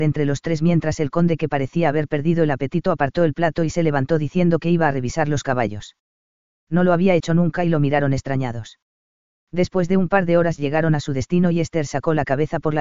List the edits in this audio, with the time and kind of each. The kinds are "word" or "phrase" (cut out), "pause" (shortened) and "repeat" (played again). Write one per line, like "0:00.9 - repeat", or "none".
none